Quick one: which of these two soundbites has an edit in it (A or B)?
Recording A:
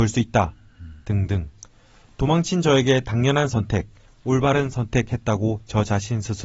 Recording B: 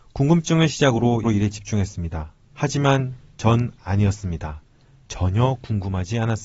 B